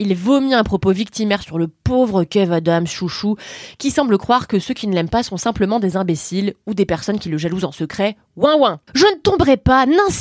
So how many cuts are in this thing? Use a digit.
1